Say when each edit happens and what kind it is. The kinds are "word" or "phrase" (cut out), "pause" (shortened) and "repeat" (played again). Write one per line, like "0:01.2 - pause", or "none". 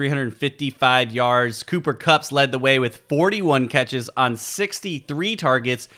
none